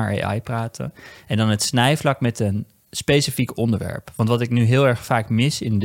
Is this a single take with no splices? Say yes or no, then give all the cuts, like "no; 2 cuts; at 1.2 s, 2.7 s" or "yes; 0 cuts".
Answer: yes; 0 cuts